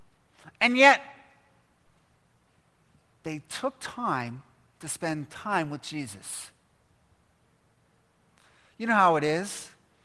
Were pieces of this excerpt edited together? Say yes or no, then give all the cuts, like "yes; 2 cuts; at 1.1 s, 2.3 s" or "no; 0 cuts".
no; 0 cuts